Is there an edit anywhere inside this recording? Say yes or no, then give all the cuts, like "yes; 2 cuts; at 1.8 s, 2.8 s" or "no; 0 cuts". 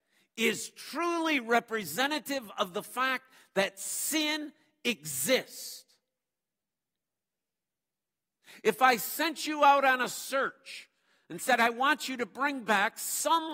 no; 0 cuts